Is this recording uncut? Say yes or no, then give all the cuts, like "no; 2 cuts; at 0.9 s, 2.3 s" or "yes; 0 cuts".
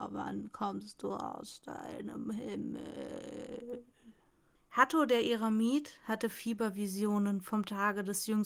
no; 1 cut; at 4.5 s